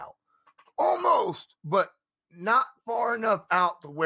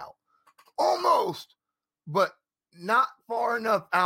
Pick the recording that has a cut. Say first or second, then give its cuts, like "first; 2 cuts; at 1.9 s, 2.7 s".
first; 1 cut; at 1.6 s